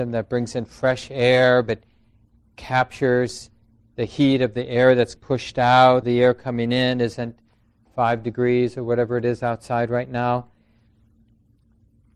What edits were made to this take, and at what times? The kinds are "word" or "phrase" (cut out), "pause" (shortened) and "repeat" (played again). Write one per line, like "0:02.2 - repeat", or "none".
0:05.2 - word
0:06.0 - word